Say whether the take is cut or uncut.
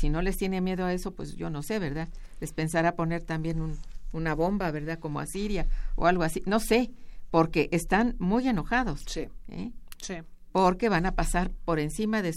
uncut